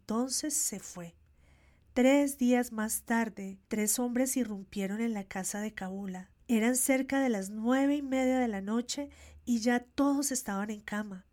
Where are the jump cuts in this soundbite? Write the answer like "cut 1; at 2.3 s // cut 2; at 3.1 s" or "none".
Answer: cut 1; at 1.3 s // cut 2; at 3.6 s // cut 3; at 6.4 s